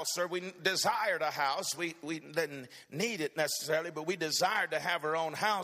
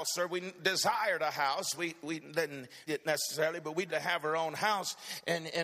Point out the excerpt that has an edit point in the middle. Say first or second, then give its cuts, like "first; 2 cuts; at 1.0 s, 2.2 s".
second; 2 cuts; at 2.9 s, 3.9 s